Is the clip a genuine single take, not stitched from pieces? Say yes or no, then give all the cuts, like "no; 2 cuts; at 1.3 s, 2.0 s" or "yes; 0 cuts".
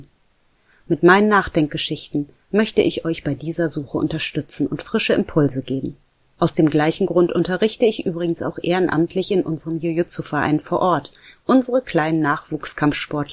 yes; 0 cuts